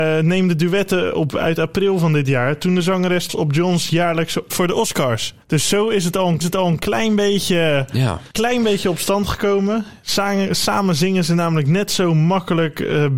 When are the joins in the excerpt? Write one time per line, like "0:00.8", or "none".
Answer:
0:01.3
0:03.3
0:04.5
0:05.4
0:06.4
0:08.3